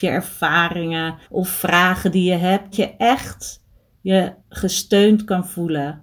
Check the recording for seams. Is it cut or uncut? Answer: cut